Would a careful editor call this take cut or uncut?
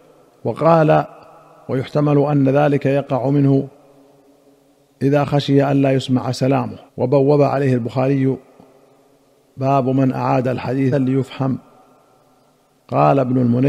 cut